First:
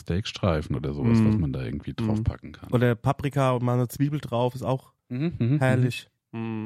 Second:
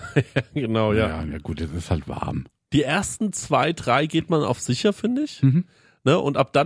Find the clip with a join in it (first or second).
first